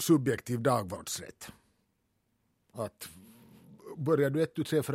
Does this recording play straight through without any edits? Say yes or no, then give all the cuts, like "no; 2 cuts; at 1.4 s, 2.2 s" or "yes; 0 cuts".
yes; 0 cuts